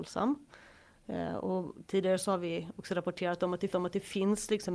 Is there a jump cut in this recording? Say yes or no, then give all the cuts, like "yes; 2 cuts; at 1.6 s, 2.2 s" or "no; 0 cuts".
yes; 1 cut; at 3.7 s